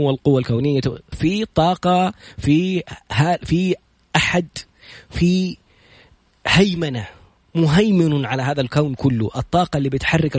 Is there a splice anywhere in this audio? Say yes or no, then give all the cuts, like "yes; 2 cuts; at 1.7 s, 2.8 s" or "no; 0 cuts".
yes; 1 cut; at 1.1 s